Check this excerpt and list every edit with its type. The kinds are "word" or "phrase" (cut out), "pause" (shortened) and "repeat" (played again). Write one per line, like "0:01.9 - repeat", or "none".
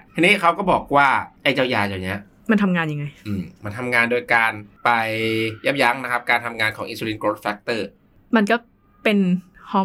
none